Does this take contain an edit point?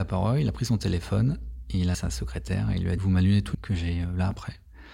yes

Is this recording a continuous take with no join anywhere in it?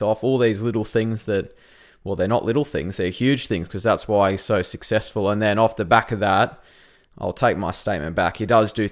yes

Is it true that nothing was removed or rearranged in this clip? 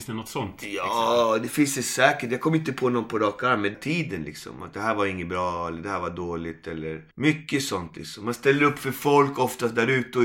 no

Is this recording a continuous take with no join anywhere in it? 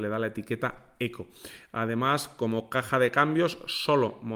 yes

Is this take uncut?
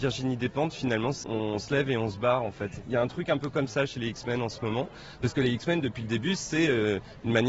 no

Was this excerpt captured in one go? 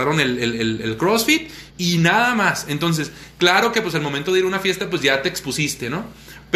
no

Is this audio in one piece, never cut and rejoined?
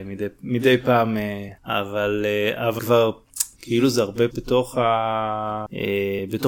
no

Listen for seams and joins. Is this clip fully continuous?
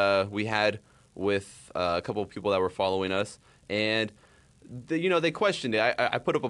yes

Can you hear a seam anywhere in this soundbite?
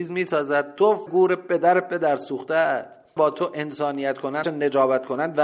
yes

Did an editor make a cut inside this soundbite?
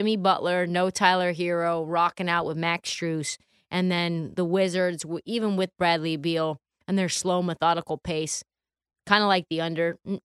no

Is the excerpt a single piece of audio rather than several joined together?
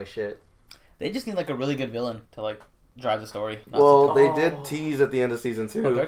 no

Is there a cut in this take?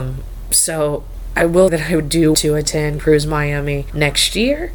yes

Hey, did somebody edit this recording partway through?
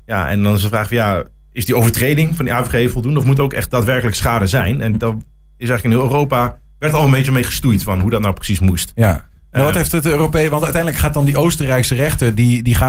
no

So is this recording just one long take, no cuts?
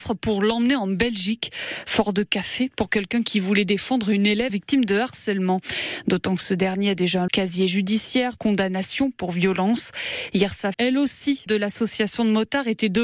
no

